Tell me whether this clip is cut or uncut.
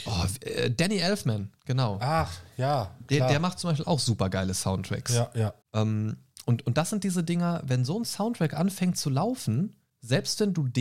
cut